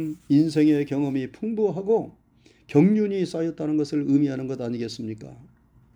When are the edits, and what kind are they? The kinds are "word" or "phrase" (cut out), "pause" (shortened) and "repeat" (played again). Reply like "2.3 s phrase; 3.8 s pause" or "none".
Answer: none